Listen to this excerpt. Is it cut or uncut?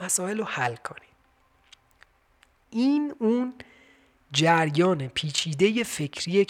uncut